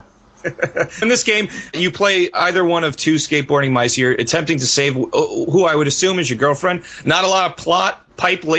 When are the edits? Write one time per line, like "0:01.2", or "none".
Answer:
0:01.0